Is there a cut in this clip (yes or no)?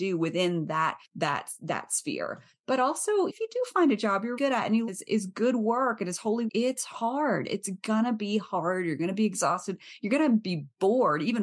yes